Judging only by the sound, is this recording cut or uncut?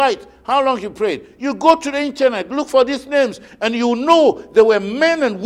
uncut